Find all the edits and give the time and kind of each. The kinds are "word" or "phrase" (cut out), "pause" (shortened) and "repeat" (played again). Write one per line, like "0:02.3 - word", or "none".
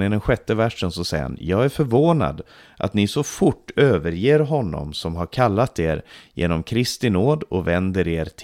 none

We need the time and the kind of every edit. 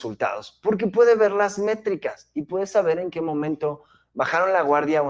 none

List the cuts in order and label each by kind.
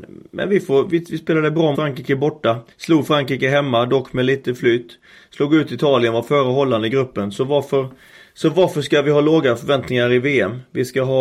0:01.7 - word
0:02.7 - pause

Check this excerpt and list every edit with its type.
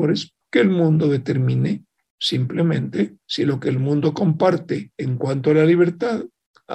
0:03.2 - pause

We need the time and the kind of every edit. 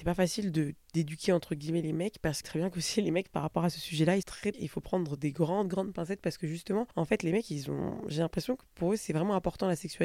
0:02.4 - phrase
0:04.2 - word
0:04.5 - phrase
0:06.9 - pause

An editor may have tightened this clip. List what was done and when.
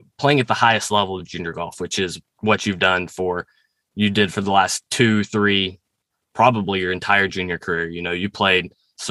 none

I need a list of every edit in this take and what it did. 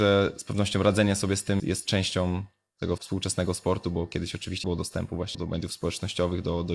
0:01.6 - word
0:03.0 - word
0:04.6 - word
0:05.3 - word

